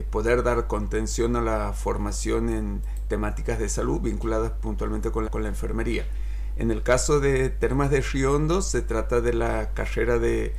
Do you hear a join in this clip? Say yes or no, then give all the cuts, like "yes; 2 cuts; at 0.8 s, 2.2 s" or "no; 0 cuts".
yes; 1 cut; at 5.2 s